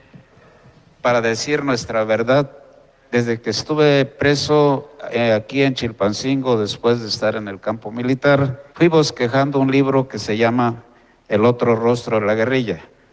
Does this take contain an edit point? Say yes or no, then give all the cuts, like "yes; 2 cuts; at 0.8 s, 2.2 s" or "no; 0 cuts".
yes; 2 cuts; at 2.9 s, 8.7 s